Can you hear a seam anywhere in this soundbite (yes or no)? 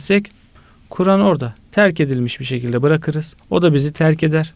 yes